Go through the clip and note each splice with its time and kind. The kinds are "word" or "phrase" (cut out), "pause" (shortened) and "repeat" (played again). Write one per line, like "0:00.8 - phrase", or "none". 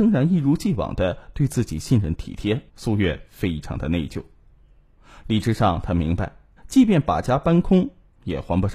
0:02.7 - pause
0:06.6 - pause